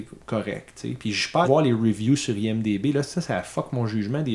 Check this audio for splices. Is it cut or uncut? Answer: cut